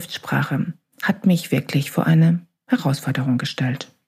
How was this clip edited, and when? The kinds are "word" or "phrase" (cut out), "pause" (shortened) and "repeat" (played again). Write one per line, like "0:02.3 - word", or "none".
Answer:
none

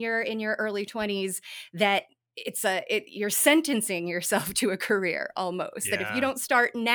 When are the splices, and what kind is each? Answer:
none

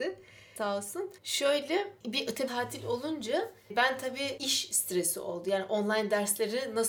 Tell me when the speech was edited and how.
0:01.2 - pause
0:02.5 - word
0:04.4 - word

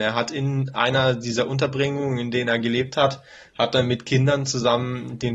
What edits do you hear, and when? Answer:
none

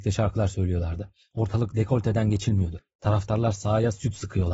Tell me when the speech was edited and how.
none

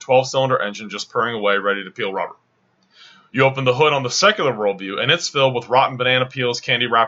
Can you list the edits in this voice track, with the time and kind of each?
none

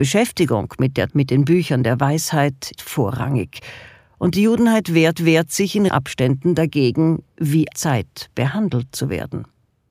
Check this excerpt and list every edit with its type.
0:01.1 - word
0:02.8 - word
0:05.2 - repeat
0:05.9 - word
0:07.7 - phrase

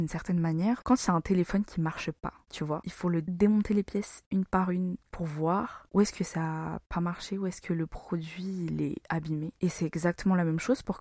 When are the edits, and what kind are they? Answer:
0:02.4 - pause
0:03.2 - word

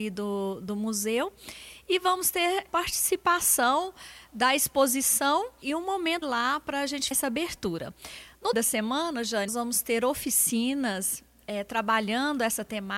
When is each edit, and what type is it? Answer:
0:02.7 - word
0:05.6 - word
0:06.2 - word
0:07.1 - word
0:08.5 - word
0:09.5 - word

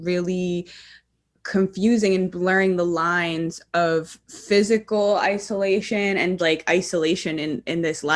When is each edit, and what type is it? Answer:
0:06.4 - word

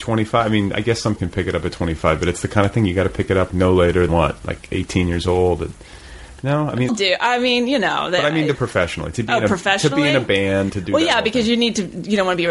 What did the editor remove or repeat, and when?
0:01.2 - word
0:03.5 - word
0:04.1 - word
0:06.9 - word
0:08.5 - word
0:10.7 - word

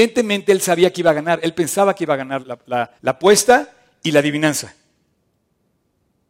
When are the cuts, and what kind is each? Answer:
0:02.4 - word
0:03.0 - pause

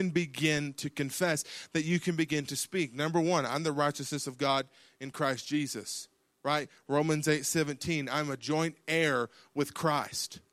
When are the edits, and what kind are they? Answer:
none

